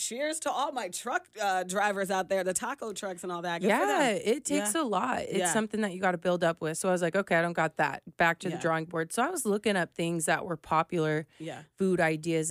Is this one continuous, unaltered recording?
yes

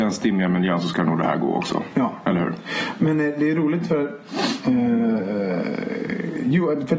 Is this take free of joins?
yes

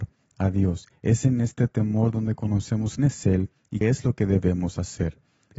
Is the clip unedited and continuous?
no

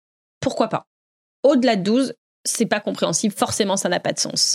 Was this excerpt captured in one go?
yes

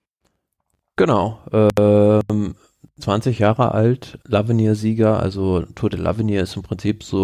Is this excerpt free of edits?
no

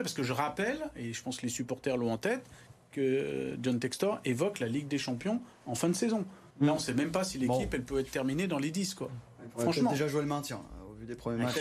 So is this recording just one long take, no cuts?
no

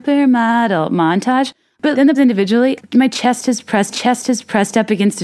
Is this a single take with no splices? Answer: no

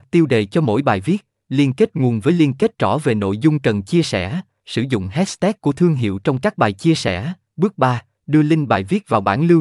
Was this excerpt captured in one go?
yes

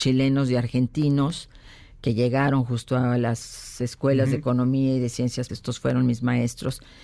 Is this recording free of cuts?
no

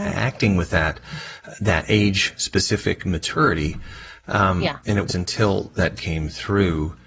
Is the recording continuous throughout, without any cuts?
no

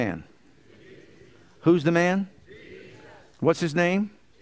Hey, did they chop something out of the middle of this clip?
no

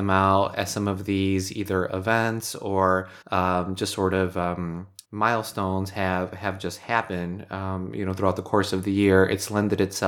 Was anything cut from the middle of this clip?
yes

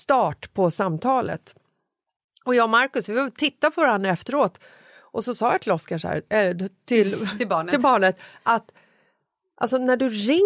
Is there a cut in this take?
no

